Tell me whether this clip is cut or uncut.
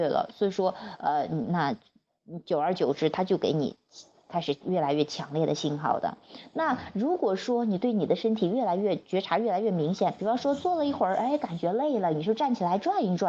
uncut